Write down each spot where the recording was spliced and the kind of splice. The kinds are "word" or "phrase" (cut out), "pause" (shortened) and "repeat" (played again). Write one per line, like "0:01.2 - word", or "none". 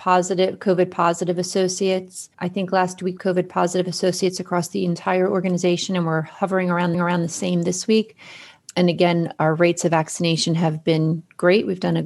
0:02.3 - pause
0:03.2 - phrase
0:06.9 - repeat